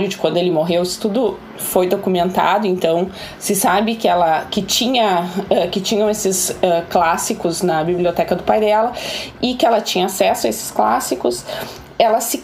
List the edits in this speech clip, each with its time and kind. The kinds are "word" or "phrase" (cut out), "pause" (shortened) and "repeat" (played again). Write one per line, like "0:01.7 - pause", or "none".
none